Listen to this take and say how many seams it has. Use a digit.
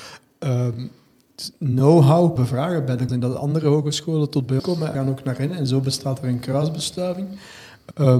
4